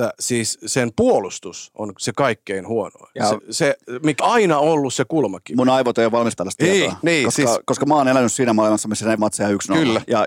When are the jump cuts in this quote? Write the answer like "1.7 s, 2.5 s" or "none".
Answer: 3.4 s, 4.2 s, 6.4 s, 9.2 s